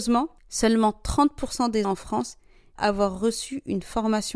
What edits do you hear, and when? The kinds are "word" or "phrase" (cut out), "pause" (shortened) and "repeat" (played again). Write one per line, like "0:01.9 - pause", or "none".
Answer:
0:01.8 - word
0:02.8 - word

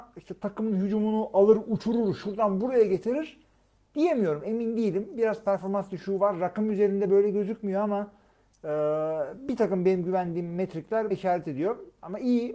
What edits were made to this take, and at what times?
0:11.1 - word

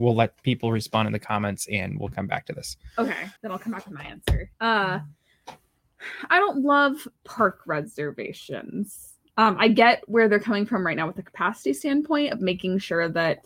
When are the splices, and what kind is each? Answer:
0:03.4 - pause
0:04.5 - pause
0:07.2 - pause

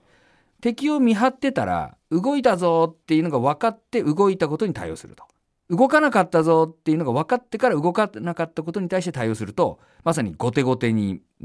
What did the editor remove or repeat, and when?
0:02.0 - pause
0:03.0 - pause
0:05.4 - pause

